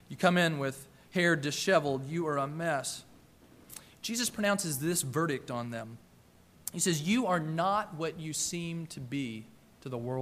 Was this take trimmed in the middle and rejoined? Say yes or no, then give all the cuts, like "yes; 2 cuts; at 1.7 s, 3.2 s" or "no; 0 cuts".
no; 0 cuts